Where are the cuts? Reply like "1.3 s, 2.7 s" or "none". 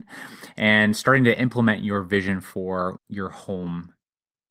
3.0 s